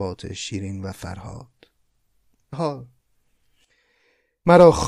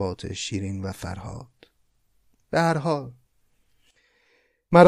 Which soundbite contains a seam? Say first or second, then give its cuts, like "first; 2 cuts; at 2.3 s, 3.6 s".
first; 1 cut; at 2.5 s